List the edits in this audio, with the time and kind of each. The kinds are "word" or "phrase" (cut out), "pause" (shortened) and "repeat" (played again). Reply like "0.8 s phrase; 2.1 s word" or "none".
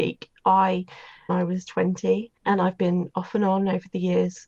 1.3 s phrase; 2.4 s pause